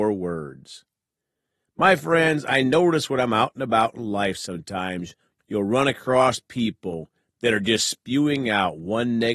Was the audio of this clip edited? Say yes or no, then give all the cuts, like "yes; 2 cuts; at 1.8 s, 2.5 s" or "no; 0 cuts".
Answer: no; 0 cuts